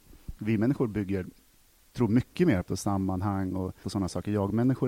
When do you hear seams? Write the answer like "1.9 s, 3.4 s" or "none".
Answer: 1.9 s, 2.7 s, 3.8 s